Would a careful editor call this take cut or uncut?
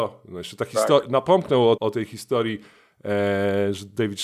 cut